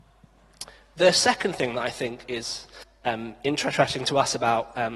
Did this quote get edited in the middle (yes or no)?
no